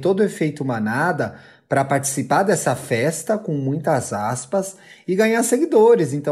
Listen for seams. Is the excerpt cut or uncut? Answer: uncut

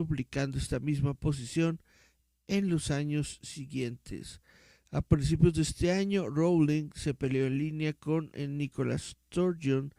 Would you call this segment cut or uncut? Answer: uncut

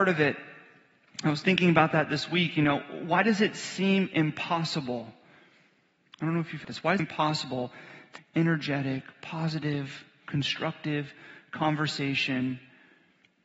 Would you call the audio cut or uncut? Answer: cut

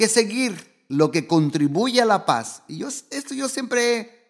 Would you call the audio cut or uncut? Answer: uncut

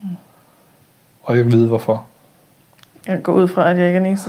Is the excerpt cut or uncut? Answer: uncut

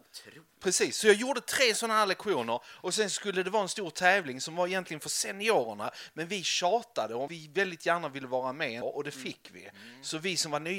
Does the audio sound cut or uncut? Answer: cut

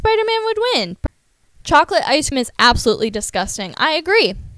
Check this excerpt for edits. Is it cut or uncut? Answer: cut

